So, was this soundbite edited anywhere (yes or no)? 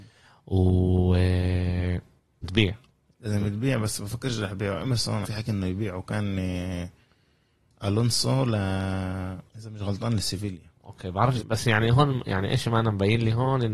yes